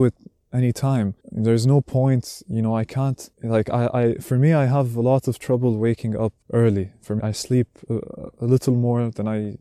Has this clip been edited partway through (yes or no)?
yes